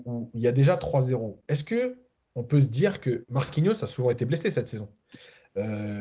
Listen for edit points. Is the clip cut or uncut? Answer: uncut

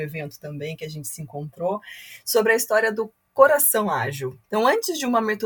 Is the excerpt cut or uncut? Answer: cut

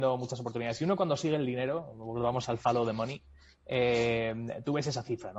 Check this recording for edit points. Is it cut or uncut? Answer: uncut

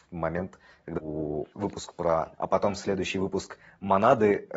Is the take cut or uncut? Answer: cut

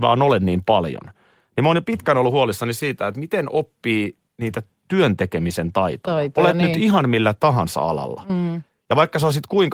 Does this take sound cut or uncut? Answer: uncut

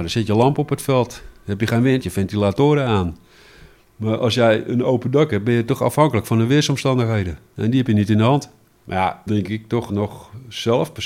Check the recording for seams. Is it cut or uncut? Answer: cut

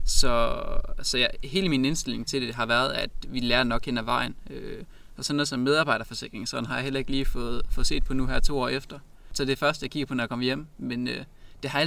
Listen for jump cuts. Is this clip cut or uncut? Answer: uncut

